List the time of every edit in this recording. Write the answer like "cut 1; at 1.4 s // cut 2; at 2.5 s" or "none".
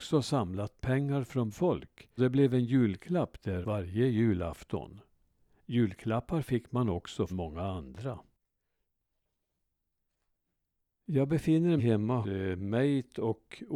cut 1; at 1.5 s // cut 2; at 2.2 s // cut 3; at 3.6 s // cut 4; at 7.3 s // cut 5; at 11.8 s // cut 6; at 12.2 s